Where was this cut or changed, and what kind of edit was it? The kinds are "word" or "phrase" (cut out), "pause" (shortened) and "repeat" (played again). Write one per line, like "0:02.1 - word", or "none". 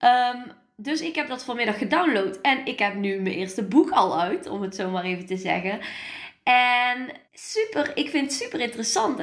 0:07.2 - pause